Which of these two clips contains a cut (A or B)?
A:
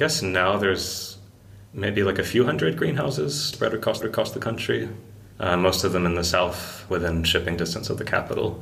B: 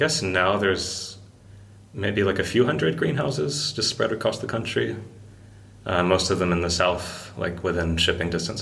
A